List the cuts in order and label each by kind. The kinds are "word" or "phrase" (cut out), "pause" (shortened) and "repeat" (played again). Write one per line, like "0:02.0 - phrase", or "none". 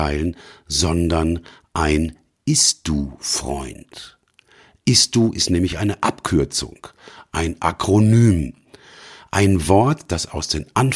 none